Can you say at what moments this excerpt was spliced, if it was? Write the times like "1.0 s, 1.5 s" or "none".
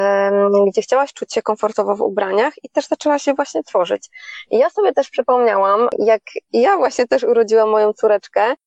none